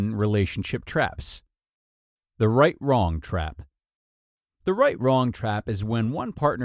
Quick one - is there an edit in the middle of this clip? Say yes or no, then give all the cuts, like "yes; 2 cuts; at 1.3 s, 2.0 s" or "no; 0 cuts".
no; 0 cuts